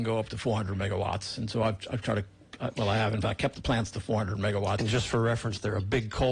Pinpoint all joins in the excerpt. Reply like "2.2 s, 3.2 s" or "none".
none